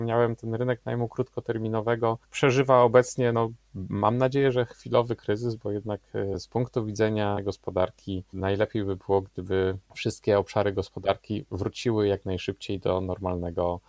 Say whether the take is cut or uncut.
uncut